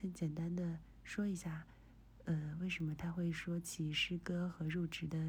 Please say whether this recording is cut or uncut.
uncut